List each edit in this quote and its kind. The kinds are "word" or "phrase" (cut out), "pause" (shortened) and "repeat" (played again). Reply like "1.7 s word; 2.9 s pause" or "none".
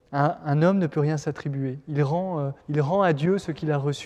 2.6 s pause